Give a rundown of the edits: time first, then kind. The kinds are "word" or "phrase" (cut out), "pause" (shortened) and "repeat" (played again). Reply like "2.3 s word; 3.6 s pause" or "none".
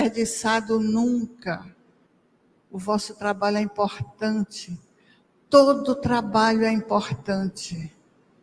none